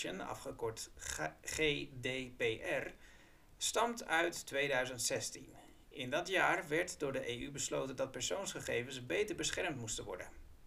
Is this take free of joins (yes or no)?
yes